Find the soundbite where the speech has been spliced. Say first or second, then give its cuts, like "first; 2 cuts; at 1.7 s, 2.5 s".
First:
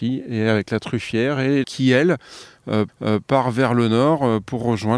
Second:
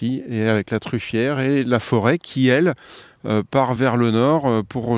first; 2 cuts; at 1.6 s, 2.9 s